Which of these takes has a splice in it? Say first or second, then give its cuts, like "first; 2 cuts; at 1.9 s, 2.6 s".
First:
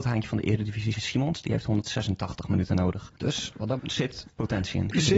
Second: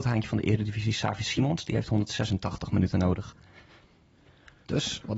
first; 3 cuts; at 0.9 s, 3.2 s, 3.8 s